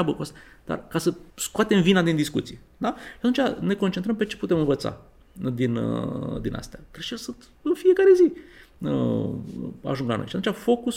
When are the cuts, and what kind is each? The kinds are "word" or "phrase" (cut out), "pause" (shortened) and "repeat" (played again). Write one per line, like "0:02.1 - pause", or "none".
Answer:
0:01.3 - pause

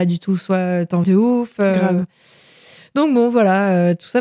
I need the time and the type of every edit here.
0:01.0 - word

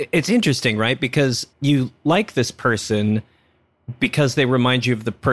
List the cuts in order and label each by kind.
0:01.5 - pause

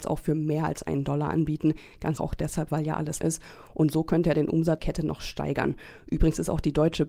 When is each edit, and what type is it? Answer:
0:02.2 - word
0:03.2 - phrase
0:04.8 - word

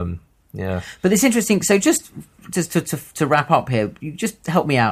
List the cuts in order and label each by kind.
none

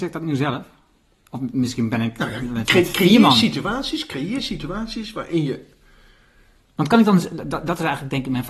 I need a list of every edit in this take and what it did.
none

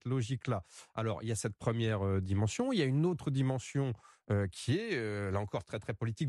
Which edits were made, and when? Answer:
none

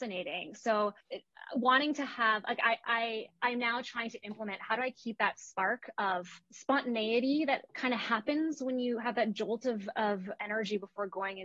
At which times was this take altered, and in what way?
0:01.0 - pause
0:06.4 - pause

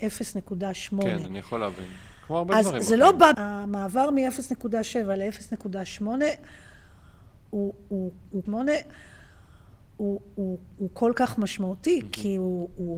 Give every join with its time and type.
0:03.3 - phrase
0:08.4 - repeat

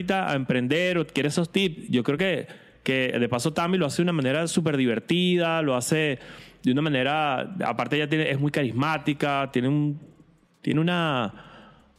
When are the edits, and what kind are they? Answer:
none

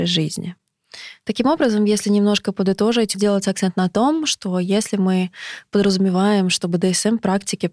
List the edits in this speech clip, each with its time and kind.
0:03.1 - word

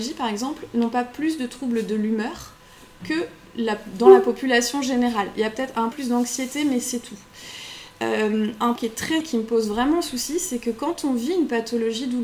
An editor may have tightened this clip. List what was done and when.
0:05.9 - word
0:08.8 - word
0:09.2 - word

